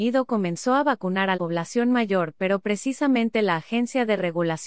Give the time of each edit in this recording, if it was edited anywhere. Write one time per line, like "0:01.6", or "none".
0:01.3